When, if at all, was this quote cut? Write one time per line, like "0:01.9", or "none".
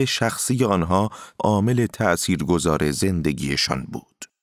0:01.4